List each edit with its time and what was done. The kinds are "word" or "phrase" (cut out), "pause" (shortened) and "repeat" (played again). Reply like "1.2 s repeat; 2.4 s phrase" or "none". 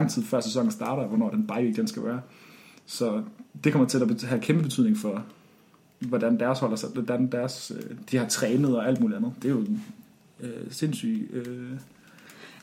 none